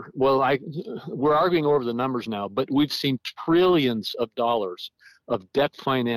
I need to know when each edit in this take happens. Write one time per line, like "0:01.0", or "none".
none